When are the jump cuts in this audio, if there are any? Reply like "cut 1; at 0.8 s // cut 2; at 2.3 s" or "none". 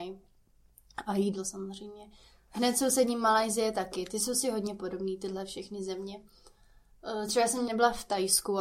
cut 1; at 7.7 s